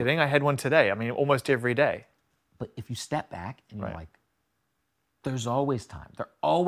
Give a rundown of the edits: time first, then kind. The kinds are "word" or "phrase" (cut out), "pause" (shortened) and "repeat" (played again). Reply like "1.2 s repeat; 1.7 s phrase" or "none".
none